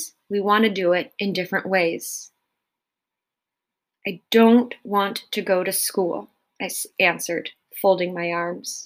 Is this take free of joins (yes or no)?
yes